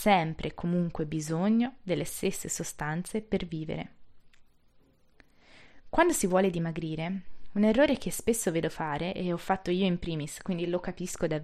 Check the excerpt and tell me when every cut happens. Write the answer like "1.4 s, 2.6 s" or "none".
none